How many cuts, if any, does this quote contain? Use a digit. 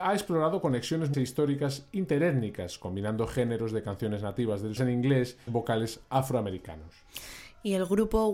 3